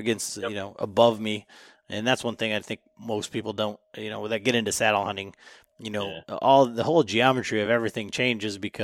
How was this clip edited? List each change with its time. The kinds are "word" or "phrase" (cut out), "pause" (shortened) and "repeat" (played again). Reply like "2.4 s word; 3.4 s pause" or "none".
none